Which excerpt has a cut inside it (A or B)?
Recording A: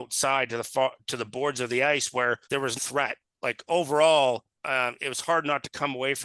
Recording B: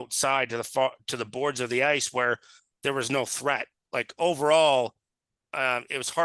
A